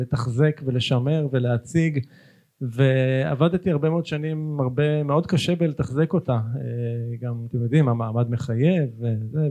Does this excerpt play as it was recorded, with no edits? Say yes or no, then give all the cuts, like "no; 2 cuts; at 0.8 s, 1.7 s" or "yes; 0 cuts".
yes; 0 cuts